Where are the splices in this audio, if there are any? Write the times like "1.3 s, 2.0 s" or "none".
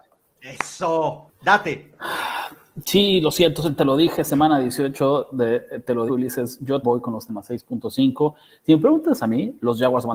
1.3 s, 3.8 s, 6.1 s, 6.8 s, 7.3 s